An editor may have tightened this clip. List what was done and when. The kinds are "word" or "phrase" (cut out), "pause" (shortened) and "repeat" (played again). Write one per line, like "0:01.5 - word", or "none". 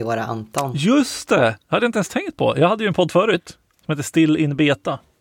none